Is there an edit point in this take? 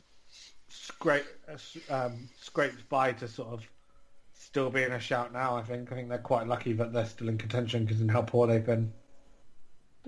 no; 0 cuts

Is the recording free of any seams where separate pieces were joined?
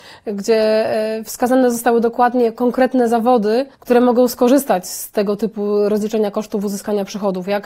no; 1 cut; at 3.7 s

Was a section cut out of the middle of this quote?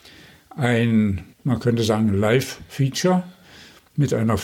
yes; 1 cut; at 1.3 s

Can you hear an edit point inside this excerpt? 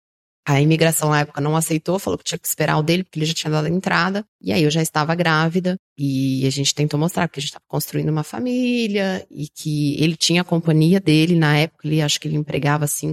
yes; 2 cuts; at 4.3 s, 5.9 s

